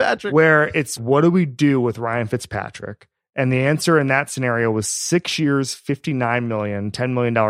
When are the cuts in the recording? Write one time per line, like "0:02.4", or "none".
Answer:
0:01.0